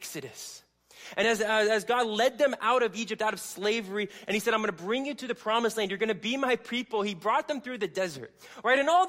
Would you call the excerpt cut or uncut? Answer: uncut